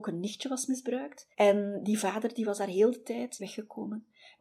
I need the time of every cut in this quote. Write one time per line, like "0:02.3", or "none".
0:01.3
0:03.4

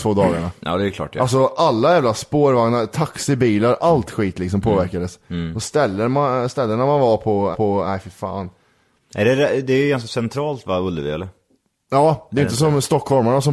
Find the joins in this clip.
0:07.5

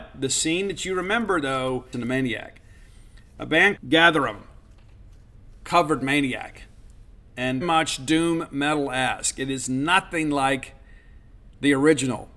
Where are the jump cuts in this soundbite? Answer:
0:01.9
0:03.8
0:07.6

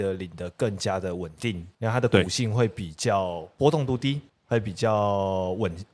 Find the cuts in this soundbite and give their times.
0:01.7
0:04.3

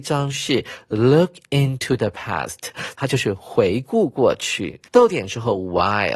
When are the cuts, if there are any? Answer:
0:04.8

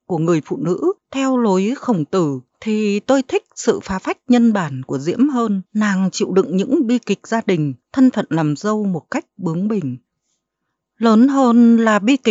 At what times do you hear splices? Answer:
0:01.0
0:02.5
0:05.7
0:07.8

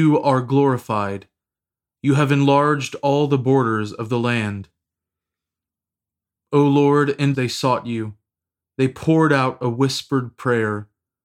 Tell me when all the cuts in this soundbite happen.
0:07.3

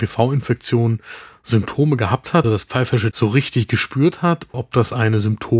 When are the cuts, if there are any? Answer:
0:02.4
0:03.1
0:04.5

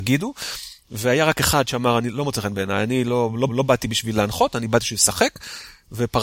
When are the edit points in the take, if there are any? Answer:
0:03.5

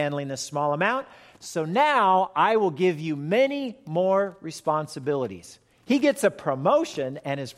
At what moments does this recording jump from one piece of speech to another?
none

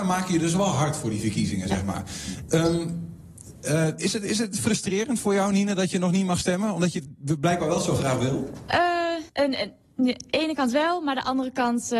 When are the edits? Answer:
0:09.3

